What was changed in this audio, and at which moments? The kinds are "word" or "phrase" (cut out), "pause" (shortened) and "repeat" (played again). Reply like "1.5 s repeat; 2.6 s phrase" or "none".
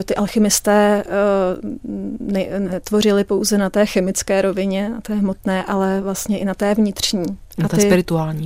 none